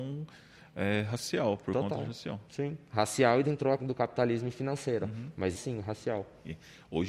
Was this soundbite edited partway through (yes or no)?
yes